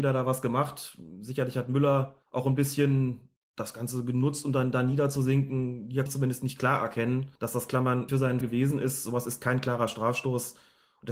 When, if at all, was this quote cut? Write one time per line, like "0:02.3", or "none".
0:02.2
0:03.4
0:06.1
0:07.4
0:08.1
0:08.4